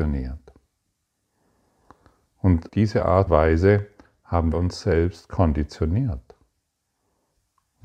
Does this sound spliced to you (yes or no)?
yes